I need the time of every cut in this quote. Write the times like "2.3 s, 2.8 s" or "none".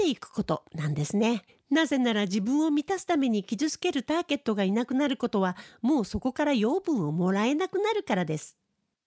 1.5 s

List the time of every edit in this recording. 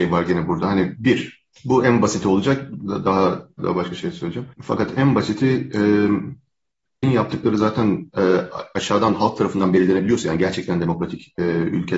3.6 s, 4.5 s, 7.0 s

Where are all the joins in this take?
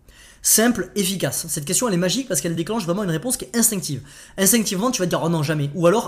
none

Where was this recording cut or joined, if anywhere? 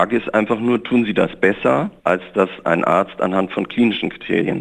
2.0 s

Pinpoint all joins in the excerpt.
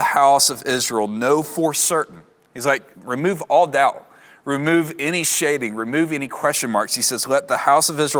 2.9 s

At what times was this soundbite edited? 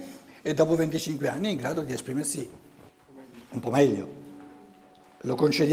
none

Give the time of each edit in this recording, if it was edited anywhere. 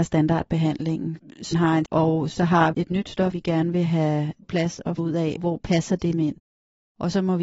1.5 s, 1.9 s, 2.7 s, 3.3 s, 4.4 s, 5.0 s, 5.4 s, 6.1 s

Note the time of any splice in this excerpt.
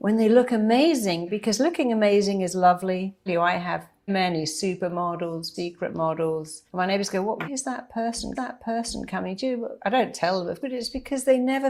3.3 s, 4.1 s, 5.5 s, 6.7 s, 7.4 s, 8.3 s, 10.6 s

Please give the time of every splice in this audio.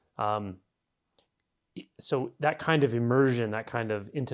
none

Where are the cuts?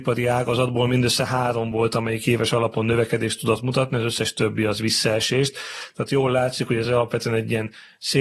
none

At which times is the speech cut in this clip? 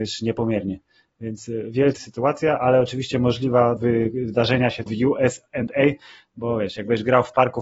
2.0 s, 3.8 s, 4.9 s

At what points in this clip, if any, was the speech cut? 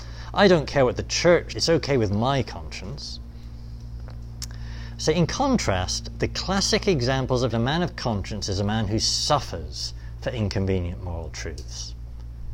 1.5 s, 7.5 s

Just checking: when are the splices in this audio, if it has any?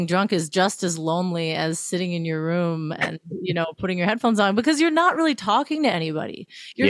none

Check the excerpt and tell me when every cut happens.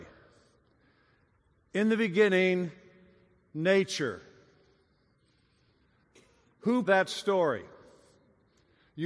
6.9 s

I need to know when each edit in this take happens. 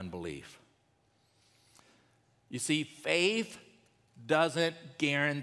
none

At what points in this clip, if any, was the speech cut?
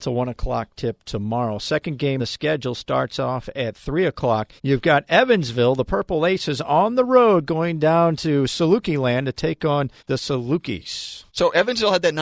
2.2 s, 4.6 s, 10.0 s, 11.3 s

